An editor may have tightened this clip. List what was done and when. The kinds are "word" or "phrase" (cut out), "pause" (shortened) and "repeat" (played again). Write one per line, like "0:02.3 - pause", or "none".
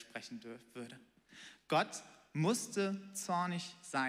none

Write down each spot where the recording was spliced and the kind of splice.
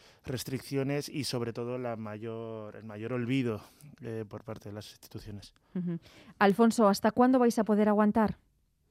none

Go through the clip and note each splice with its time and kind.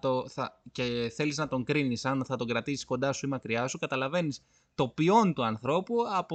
none

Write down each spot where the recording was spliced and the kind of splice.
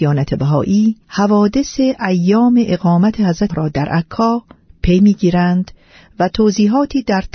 0:01.0 - pause
0:03.5 - word

